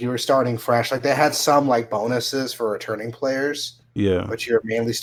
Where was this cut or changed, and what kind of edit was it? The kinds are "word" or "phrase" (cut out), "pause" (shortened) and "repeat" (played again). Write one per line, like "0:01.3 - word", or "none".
0:03.9 - pause